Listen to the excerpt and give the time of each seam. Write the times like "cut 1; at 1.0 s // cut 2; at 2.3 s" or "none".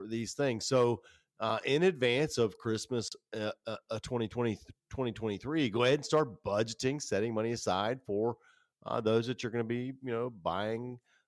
cut 1; at 4.8 s